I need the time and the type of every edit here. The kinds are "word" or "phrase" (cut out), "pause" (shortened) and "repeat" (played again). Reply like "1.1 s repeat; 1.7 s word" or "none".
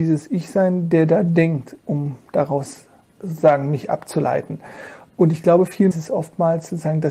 1.8 s pause; 3.0 s pause; 5.9 s phrase